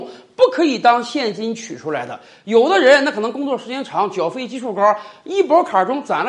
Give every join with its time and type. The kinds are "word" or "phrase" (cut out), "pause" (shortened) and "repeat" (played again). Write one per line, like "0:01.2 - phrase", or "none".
none